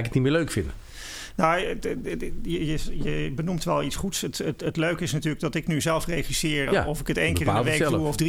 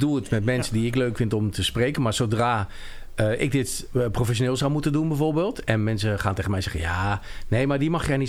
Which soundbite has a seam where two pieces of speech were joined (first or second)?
first